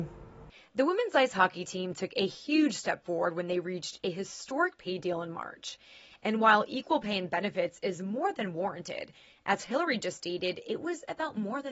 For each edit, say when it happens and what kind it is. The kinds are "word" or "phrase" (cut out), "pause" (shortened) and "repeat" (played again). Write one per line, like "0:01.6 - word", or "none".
none